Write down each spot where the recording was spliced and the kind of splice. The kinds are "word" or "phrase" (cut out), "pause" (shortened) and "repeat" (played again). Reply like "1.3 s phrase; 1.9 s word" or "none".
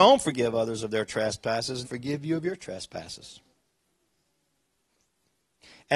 1.8 s phrase